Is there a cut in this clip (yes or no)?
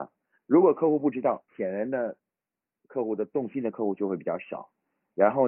yes